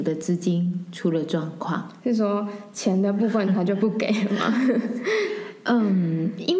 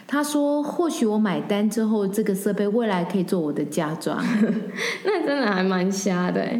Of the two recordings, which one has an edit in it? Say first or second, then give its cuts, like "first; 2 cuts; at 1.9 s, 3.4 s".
first; 1 cut; at 2.0 s